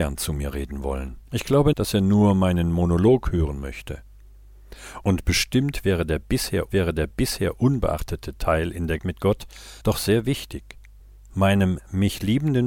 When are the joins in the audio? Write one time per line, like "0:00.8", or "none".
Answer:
0:01.3
0:01.7
0:06.7
0:09.0
0:09.8
0:11.0